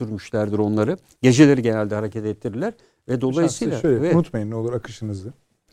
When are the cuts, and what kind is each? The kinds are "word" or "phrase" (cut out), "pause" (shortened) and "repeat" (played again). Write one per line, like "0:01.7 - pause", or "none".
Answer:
none